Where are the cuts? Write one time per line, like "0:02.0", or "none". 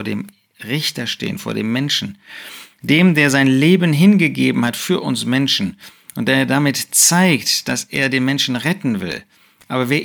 none